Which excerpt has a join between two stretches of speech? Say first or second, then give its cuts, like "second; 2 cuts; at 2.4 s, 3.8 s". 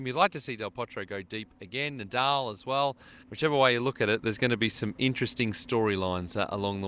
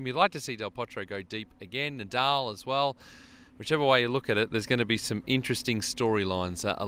first; 1 cut; at 3.2 s